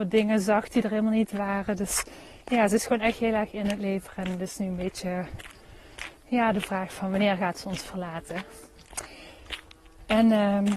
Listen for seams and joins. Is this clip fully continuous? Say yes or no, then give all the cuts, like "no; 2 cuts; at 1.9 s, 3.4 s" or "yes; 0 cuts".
yes; 0 cuts